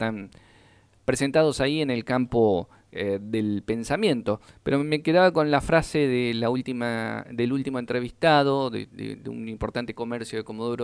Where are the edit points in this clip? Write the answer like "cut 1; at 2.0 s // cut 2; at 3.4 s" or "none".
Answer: none